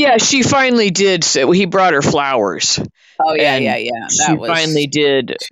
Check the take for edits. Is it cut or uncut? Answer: uncut